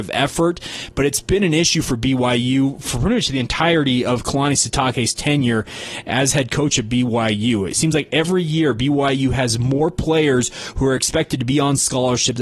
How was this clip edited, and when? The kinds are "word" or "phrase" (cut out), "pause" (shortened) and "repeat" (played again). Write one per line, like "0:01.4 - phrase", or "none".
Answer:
none